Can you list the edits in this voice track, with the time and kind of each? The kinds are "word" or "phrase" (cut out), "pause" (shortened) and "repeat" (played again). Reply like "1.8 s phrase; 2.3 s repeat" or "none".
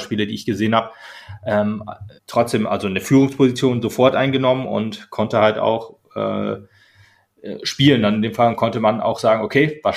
2.2 s pause